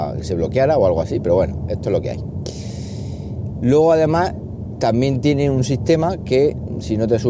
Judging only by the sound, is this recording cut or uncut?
uncut